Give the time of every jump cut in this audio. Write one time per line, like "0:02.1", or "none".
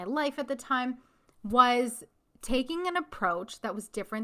none